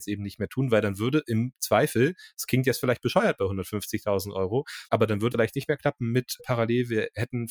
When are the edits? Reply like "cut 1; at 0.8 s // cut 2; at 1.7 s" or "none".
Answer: cut 1; at 4.9 s // cut 2; at 5.3 s // cut 3; at 6.4 s